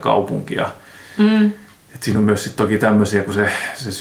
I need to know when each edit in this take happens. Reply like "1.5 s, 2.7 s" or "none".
none